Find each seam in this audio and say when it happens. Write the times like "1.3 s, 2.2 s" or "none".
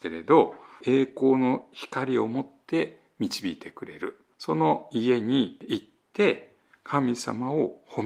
none